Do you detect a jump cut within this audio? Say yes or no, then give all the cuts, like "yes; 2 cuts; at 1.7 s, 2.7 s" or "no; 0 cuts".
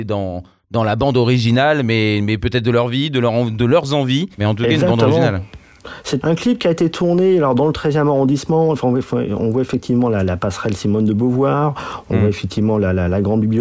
yes; 2 cuts; at 4.3 s, 6.2 s